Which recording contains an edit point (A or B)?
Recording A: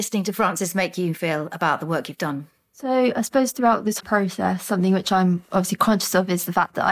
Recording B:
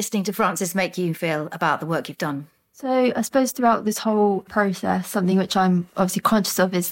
A